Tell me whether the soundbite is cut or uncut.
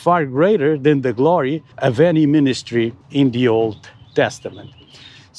cut